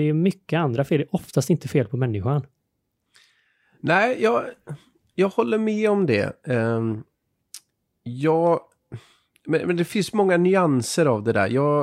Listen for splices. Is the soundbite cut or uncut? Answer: uncut